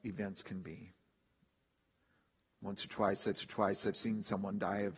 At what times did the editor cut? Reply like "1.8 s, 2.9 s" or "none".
3.4 s